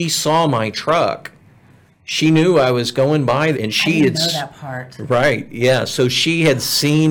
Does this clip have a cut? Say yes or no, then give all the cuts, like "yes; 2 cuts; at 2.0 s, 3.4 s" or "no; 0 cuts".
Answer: yes; 1 cut; at 3.5 s